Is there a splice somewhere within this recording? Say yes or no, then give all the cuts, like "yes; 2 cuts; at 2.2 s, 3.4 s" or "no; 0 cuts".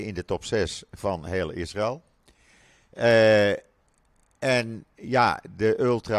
no; 0 cuts